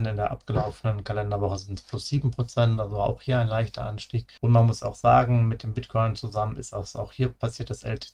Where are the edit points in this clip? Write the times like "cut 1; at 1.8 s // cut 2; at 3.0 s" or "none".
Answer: cut 1; at 4.4 s